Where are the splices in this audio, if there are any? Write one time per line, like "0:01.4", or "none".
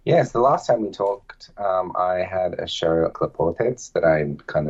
0:03.1

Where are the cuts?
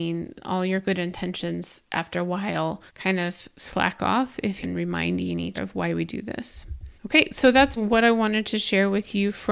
0:01.9
0:02.9
0:04.6
0:05.6
0:07.0
0:07.8

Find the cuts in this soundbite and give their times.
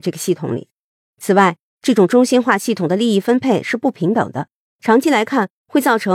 none

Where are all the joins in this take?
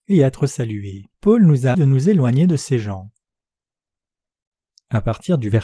0:01.1
0:01.7

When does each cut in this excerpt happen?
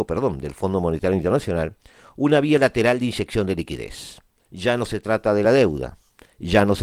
none

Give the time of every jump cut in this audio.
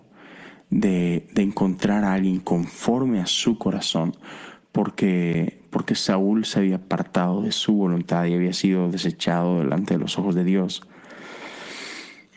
none

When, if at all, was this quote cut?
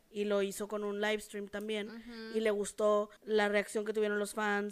0:03.2

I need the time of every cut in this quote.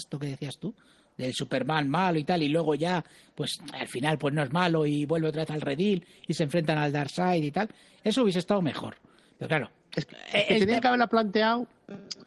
none

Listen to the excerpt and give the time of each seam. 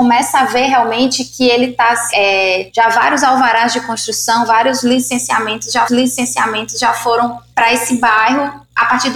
0:05.9

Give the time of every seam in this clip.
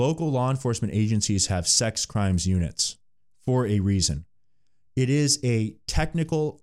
none

